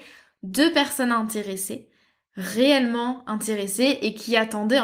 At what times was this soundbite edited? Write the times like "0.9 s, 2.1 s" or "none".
none